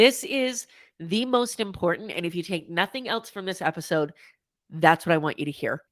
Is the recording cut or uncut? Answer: uncut